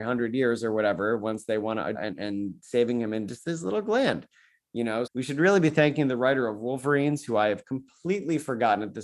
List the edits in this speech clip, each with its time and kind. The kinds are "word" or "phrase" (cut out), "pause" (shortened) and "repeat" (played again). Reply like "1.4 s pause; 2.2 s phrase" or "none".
2.0 s phrase; 5.1 s word